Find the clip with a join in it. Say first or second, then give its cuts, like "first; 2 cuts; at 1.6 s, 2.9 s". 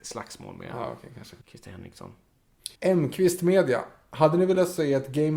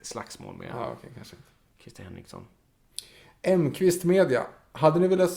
first; 2 cuts; at 1.4 s, 2.8 s